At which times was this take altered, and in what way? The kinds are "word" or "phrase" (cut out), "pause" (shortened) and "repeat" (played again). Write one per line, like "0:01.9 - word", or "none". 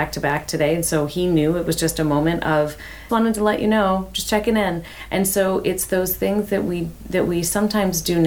0:03.1 - word